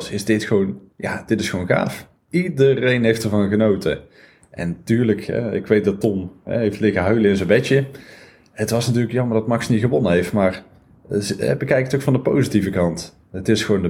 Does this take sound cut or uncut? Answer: uncut